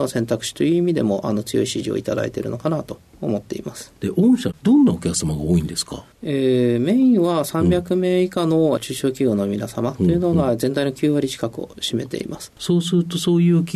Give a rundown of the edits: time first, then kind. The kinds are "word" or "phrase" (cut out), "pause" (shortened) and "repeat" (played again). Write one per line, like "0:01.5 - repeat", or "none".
0:06.1 - pause
0:08.8 - phrase